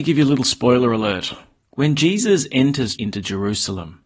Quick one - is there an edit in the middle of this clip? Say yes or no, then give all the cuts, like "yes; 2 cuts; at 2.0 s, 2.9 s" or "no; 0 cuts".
yes; 2 cuts; at 1.6 s, 3.0 s